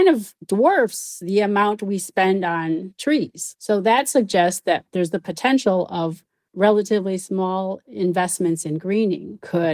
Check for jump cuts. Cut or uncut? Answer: uncut